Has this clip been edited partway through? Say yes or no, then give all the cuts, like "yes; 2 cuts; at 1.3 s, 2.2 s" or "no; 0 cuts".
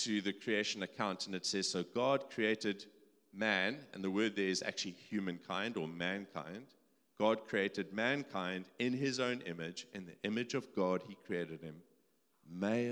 no; 0 cuts